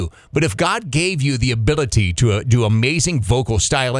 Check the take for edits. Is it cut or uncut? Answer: uncut